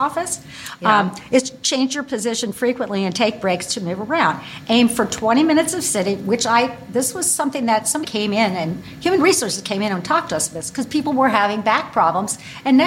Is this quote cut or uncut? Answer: cut